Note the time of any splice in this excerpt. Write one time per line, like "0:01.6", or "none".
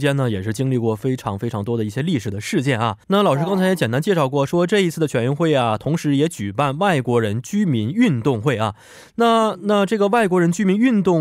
0:03.0